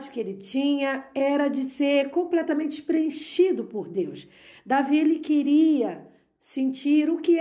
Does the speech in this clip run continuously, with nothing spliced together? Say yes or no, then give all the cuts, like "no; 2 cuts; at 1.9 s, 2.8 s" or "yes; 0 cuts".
yes; 0 cuts